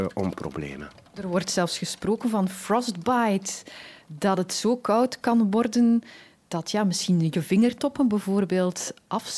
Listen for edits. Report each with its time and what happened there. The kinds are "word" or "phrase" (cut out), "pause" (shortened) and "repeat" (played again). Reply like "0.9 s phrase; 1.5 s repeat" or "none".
none